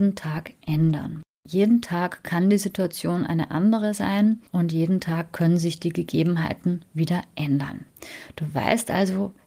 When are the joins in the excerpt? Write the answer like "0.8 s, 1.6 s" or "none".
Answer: 4.5 s, 6.8 s